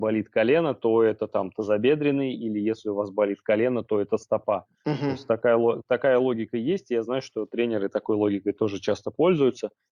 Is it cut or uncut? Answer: uncut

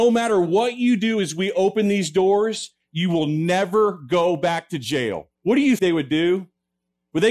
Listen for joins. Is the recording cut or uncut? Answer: cut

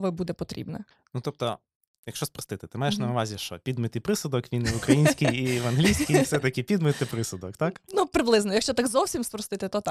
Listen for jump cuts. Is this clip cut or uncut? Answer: uncut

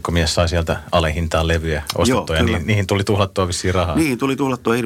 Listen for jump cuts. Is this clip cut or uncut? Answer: uncut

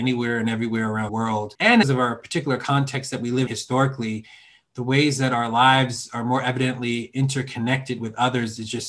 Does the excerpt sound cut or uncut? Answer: cut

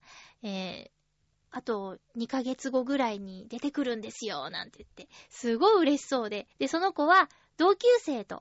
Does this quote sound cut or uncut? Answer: cut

